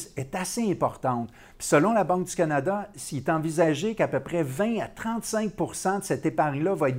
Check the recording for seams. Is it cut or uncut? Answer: uncut